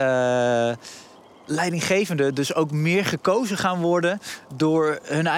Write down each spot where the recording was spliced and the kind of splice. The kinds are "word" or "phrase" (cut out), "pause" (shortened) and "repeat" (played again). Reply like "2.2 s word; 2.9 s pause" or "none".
none